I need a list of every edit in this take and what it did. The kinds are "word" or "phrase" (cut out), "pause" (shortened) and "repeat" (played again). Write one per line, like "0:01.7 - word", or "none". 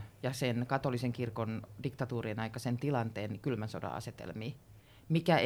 none